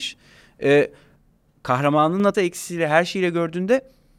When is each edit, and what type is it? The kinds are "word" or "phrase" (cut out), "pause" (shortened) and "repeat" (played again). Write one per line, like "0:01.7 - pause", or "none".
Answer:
0:02.3 - phrase